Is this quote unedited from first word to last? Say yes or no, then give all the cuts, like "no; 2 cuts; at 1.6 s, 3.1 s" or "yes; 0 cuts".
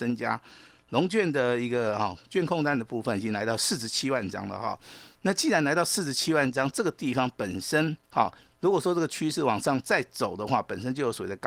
no; 1 cut; at 8.0 s